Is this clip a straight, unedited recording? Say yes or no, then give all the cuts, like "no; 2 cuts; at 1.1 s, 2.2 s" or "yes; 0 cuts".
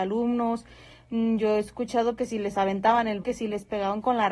no; 2 cuts; at 2.2 s, 3.2 s